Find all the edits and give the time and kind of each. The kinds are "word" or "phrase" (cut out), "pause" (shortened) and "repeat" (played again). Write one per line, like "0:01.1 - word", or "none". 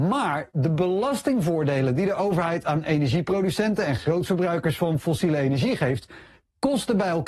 none